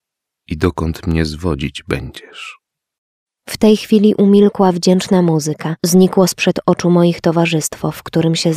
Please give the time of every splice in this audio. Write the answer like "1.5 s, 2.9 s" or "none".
5.8 s